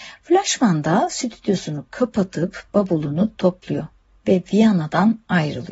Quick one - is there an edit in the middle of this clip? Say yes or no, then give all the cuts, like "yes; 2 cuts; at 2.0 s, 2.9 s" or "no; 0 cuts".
no; 0 cuts